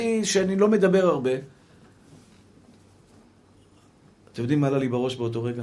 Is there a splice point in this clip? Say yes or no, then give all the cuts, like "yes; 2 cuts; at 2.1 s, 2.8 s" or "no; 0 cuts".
no; 0 cuts